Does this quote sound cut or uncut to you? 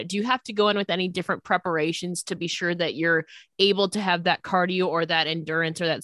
uncut